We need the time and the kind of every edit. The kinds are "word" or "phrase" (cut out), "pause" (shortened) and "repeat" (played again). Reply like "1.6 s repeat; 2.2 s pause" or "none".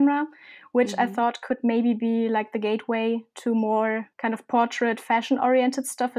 4.1 s pause